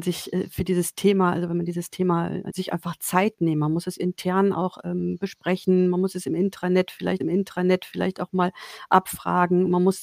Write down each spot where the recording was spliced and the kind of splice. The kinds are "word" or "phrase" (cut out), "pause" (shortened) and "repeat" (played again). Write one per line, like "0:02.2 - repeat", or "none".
0:02.5 - phrase
0:07.2 - repeat